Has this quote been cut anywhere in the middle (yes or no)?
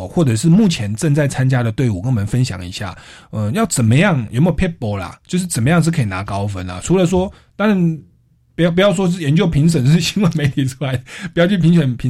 no